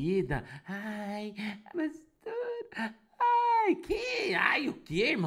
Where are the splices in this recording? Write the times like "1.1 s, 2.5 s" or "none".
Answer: 1.7 s